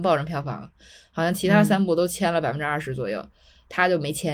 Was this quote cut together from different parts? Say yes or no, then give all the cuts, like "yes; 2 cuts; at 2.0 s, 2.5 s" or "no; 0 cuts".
no; 0 cuts